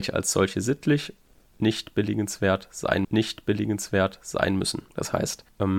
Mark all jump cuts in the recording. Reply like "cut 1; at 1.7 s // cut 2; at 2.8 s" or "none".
cut 1; at 3.0 s